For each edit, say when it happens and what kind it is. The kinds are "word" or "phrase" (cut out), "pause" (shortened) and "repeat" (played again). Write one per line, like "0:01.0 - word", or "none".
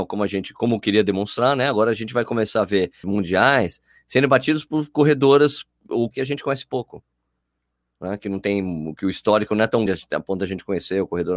0:03.0 - word
0:06.1 - word
0:09.9 - word